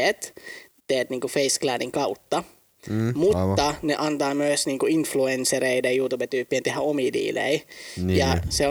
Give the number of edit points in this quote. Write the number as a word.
zero